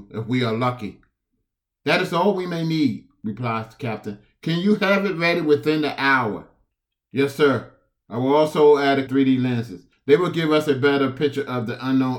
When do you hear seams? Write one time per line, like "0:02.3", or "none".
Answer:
0:09.1